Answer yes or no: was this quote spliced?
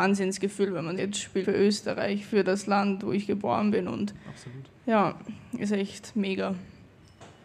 yes